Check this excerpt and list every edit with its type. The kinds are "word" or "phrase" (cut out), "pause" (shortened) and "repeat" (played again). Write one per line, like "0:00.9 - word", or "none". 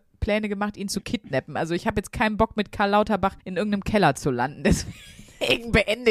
0:03.4 - pause